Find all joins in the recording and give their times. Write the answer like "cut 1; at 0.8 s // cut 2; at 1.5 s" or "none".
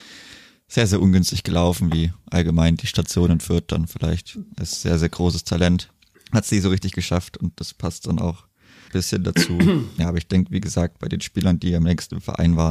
cut 1; at 6.1 s // cut 2; at 8.9 s